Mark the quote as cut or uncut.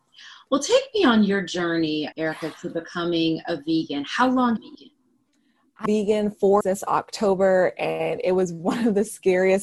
cut